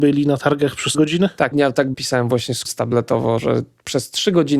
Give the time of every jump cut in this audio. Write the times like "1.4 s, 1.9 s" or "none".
0.9 s, 1.5 s, 1.9 s, 2.6 s